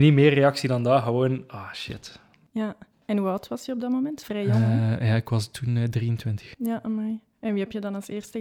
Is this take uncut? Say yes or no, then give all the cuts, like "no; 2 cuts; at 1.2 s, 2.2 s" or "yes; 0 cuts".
yes; 0 cuts